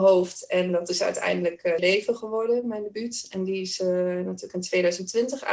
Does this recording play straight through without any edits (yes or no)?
no